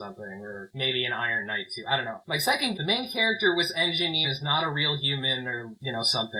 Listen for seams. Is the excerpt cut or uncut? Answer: cut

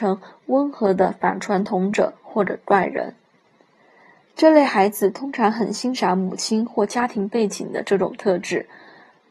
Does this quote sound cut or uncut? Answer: uncut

